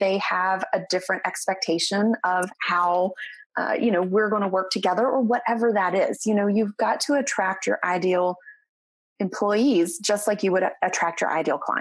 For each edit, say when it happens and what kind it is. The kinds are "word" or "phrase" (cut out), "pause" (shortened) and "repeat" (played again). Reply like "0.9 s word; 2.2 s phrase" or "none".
none